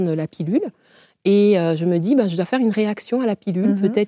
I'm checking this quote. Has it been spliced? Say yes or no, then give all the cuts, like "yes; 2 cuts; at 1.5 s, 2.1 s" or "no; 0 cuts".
no; 0 cuts